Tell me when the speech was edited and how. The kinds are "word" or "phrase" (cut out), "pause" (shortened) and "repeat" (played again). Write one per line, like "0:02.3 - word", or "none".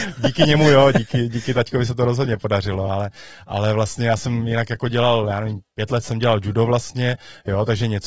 none